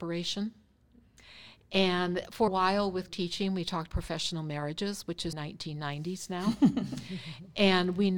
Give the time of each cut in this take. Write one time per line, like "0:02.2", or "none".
0:02.5
0:03.1
0:03.9
0:05.3

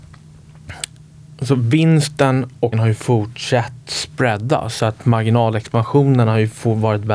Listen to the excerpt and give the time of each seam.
0:02.7
0:03.8

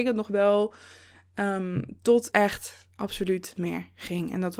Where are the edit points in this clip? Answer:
0:02.3
0:03.6

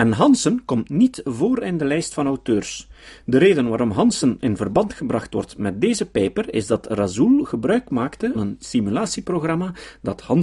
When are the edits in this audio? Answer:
0:08.3

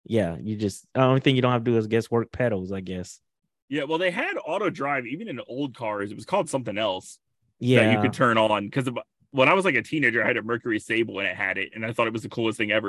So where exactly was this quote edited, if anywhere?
none

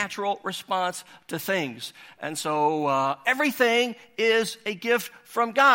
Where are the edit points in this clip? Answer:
none

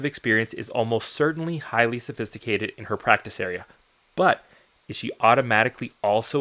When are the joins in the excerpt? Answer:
none

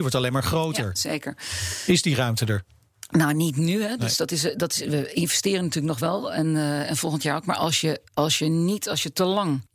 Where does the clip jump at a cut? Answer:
0:08.1

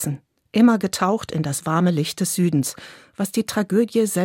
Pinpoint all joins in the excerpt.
none

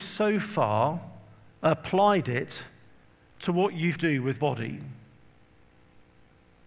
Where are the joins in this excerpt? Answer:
0:04.0
0:04.4

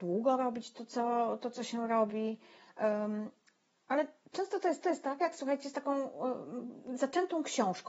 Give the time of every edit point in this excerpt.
0:04.8

